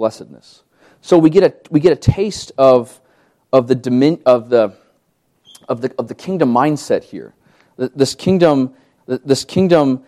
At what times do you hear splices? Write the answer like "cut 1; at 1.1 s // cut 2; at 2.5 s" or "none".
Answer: cut 1; at 9.0 s